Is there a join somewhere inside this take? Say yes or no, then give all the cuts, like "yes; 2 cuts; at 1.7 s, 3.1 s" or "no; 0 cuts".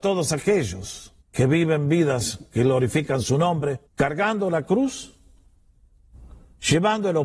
yes; 2 cuts; at 1.2 s, 3.9 s